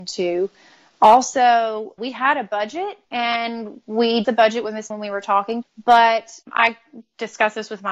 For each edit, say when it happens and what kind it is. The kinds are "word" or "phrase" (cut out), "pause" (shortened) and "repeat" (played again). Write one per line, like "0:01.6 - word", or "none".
0:02.0 - word
0:03.0 - pause
0:04.2 - word
0:04.9 - word
0:05.6 - phrase
0:06.4 - pause